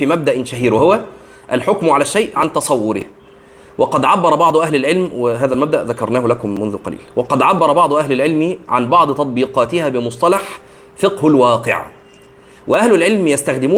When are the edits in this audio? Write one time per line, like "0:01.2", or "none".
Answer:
0:02.4